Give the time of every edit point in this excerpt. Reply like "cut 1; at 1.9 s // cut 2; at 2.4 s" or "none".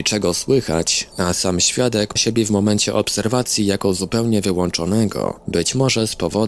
cut 1; at 2.2 s